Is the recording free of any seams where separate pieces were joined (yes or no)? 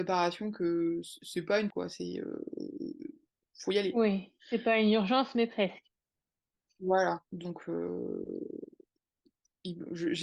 no